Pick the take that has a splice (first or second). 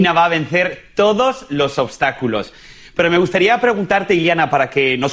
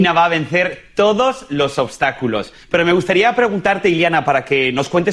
second